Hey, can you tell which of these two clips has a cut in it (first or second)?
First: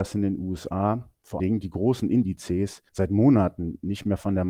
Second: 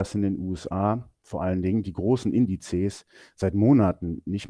first